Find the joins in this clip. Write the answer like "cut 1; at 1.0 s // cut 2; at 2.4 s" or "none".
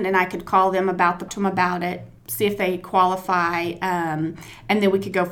cut 1; at 1.3 s